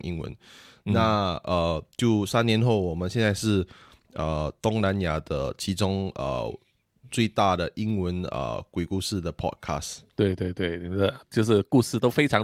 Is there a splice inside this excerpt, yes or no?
yes